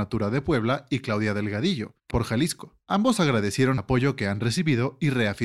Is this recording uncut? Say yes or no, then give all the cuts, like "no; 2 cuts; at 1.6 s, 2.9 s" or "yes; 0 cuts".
no; 2 cuts; at 2.1 s, 3.8 s